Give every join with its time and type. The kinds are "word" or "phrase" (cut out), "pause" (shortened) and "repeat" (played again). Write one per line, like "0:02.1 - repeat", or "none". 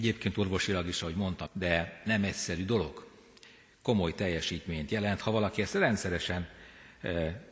0:01.5 - word

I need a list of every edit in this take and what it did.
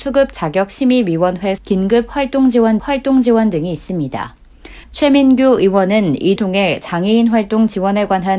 0:01.6 - word
0:02.8 - repeat
0:04.8 - pause
0:06.4 - word

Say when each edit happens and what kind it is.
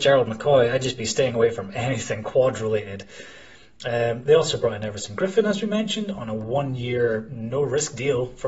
none

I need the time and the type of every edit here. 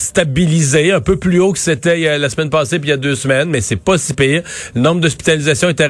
none

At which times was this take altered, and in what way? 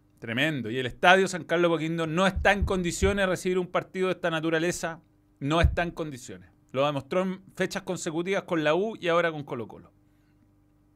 none

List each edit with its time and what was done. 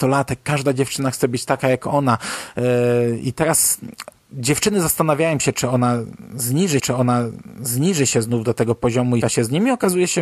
0:04.2 - pause
0:06.8 - repeat
0:09.2 - word

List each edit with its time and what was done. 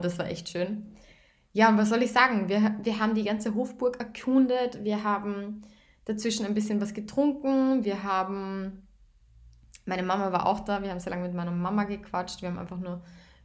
none

